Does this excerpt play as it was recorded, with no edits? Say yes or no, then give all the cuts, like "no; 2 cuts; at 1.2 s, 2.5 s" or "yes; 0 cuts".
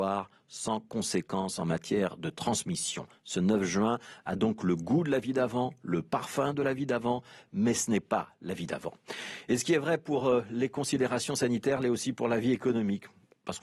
yes; 0 cuts